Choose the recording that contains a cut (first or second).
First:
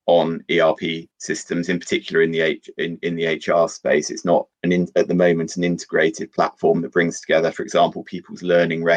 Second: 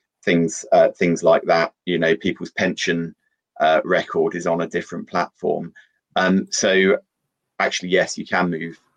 first